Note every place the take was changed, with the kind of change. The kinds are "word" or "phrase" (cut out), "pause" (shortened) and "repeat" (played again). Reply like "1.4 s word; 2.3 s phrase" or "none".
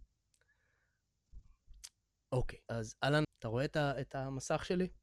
2.7 s word; 3.2 s word